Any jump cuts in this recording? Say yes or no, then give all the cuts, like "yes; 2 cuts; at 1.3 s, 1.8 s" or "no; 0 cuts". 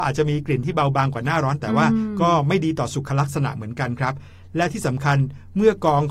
no; 0 cuts